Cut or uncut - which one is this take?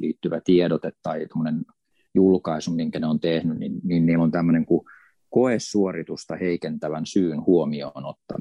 uncut